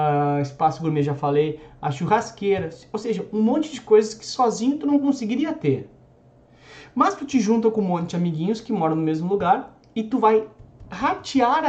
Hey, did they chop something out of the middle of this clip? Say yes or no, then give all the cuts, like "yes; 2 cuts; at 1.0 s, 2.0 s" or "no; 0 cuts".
no; 0 cuts